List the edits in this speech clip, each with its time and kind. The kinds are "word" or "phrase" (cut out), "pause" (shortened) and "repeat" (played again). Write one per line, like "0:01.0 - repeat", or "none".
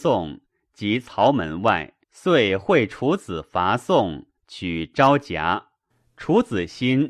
0:02.0 - pause